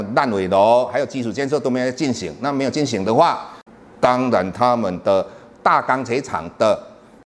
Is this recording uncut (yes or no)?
no